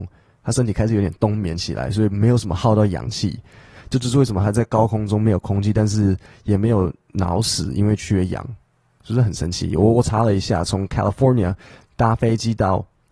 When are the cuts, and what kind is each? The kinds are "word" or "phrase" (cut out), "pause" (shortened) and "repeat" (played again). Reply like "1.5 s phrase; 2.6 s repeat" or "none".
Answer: none